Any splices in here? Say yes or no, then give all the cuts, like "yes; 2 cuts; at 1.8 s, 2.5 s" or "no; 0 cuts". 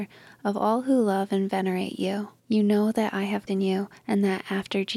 yes; 3 cuts; at 2.4 s, 3.5 s, 4.0 s